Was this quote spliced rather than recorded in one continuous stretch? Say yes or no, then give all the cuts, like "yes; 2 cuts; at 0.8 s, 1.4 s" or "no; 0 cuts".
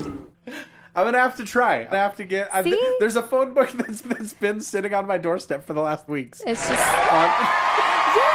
yes; 3 cuts; at 1.9 s, 4.0 s, 6.1 s